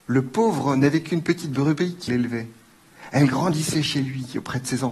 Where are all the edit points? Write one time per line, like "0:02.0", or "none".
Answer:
0:02.1